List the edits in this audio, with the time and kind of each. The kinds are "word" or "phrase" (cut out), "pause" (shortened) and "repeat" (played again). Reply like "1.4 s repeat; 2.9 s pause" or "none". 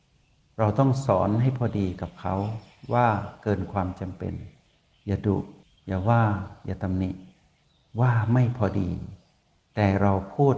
none